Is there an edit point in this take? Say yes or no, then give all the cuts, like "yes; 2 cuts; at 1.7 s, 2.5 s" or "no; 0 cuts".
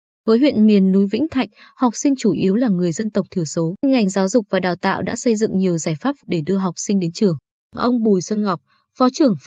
yes; 2 cuts; at 3.8 s, 6.2 s